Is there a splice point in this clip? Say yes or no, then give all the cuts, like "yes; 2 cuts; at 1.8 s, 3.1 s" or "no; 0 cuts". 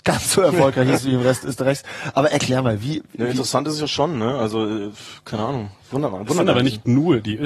no; 0 cuts